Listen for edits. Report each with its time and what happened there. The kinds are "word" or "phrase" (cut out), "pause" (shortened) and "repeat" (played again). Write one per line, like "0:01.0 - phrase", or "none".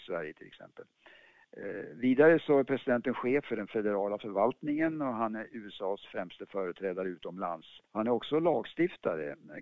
0:07.9 - pause